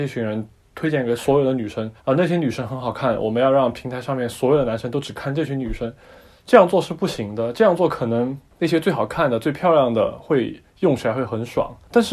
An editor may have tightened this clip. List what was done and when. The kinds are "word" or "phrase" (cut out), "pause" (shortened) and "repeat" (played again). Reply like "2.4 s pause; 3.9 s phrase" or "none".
2.0 s pause